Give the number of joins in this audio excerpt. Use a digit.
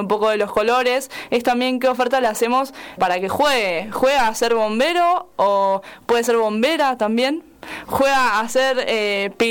1